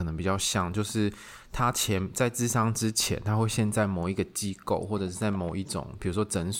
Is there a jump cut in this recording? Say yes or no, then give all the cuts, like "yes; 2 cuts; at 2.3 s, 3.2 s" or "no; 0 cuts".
no; 0 cuts